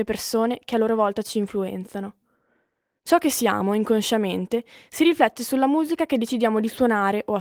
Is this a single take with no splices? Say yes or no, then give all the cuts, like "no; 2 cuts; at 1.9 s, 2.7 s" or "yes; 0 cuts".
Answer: yes; 0 cuts